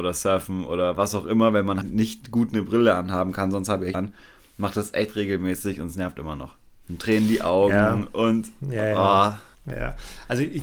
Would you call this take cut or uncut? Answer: cut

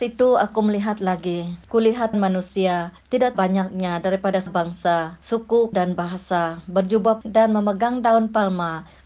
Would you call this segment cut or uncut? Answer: cut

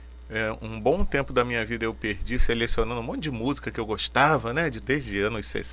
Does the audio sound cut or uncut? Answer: cut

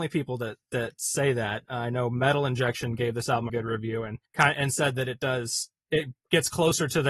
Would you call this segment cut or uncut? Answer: cut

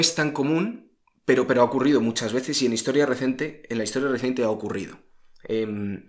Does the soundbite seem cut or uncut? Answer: uncut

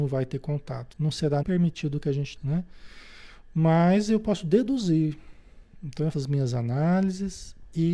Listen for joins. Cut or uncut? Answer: cut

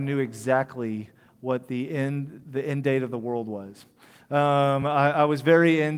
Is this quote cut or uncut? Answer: uncut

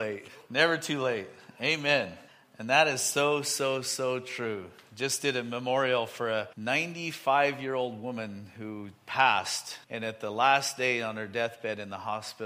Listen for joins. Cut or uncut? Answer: cut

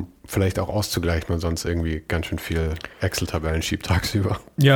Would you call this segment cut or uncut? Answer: cut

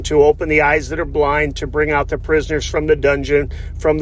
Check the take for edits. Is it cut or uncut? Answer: uncut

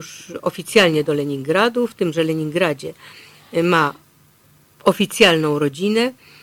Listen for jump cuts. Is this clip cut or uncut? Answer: uncut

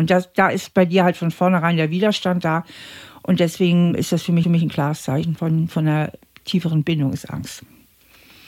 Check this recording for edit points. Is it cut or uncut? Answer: cut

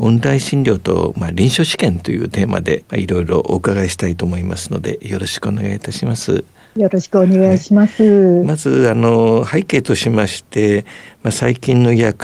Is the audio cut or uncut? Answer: uncut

